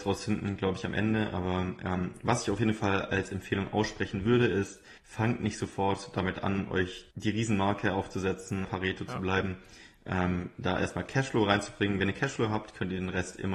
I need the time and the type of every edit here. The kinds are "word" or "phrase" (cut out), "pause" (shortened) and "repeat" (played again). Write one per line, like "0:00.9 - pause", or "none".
0:05.0 - pause
0:07.1 - pause
0:08.6 - phrase

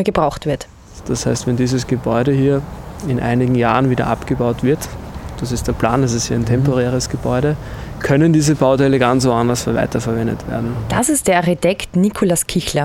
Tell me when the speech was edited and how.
none

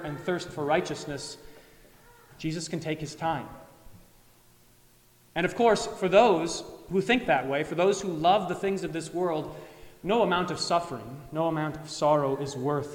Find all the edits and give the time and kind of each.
none

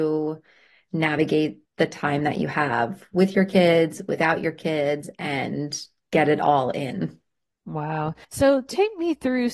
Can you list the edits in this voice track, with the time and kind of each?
0:01.7 - pause
0:08.2 - pause

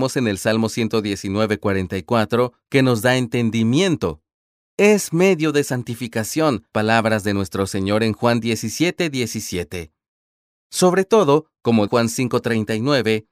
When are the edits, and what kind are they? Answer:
0:06.7 - phrase
0:11.9 - word

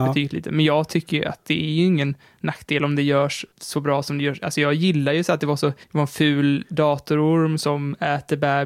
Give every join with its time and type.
0:03.5 - pause
0:05.8 - pause

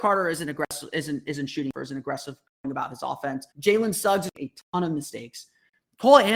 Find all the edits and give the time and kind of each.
0:01.7 - word
0:03.5 - pause
0:04.4 - phrase

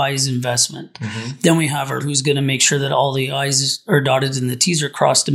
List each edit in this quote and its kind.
0:02.0 - word

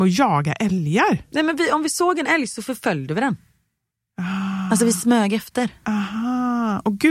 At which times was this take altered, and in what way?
none

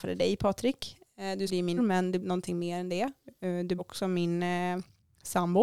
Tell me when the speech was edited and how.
0:01.5 - word
0:01.8 - word
0:02.2 - word
0:03.8 - word

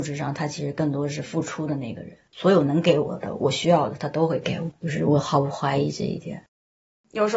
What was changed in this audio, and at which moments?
0:02.3 - pause

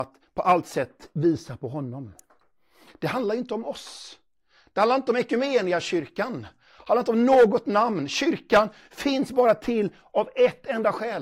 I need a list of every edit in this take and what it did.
none

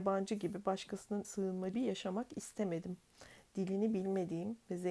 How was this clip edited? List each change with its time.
0:01.2 - word
0:01.7 - word

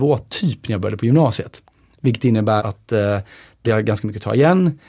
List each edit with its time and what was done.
0:02.6 - word
0:03.6 - word

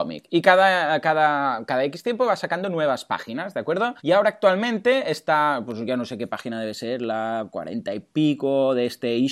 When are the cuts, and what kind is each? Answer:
0:04.0 - pause

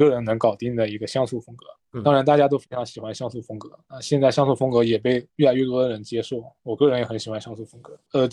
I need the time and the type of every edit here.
0:05.3 - pause

